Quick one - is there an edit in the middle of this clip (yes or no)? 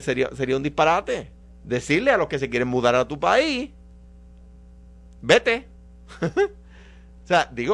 yes